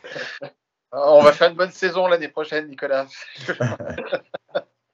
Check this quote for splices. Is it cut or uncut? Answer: uncut